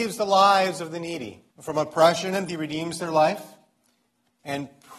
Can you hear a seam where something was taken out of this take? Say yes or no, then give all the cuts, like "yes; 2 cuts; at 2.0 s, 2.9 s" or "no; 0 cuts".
yes; 2 cuts; at 1.5 s, 2.5 s